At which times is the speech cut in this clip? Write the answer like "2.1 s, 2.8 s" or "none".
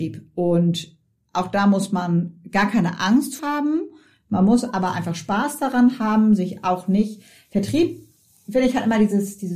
3.4 s